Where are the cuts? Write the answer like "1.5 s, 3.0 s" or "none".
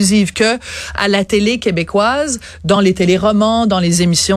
none